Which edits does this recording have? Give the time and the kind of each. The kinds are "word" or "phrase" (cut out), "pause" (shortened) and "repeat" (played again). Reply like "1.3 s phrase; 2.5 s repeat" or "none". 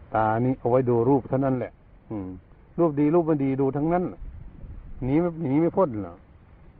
none